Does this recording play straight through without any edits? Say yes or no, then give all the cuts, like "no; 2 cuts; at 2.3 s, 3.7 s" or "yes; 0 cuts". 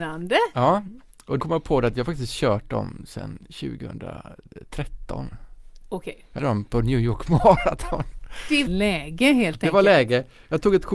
no; 3 cuts; at 1.4 s, 6.4 s, 8.7 s